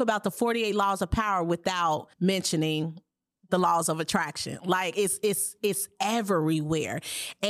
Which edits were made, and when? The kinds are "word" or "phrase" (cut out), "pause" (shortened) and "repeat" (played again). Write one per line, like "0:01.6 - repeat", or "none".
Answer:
0:02.1 - pause